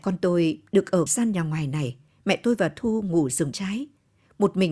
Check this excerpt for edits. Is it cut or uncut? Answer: cut